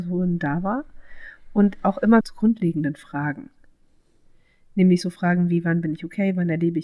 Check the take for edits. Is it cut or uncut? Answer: cut